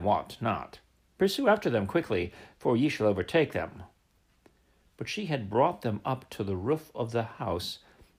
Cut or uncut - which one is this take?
uncut